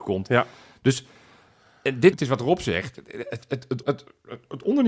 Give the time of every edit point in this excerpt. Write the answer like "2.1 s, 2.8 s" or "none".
2.1 s, 3.8 s